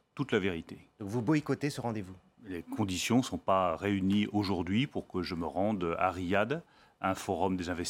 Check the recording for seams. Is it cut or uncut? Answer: uncut